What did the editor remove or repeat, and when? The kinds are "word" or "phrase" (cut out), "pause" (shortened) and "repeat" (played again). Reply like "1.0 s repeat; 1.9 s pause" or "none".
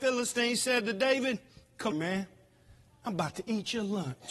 1.9 s word